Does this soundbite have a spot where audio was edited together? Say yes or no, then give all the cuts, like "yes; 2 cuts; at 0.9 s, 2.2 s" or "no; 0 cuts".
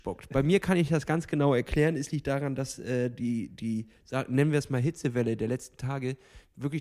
no; 0 cuts